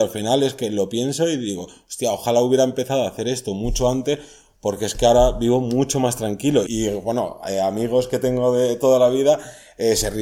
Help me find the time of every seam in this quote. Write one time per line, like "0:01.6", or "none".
0:06.7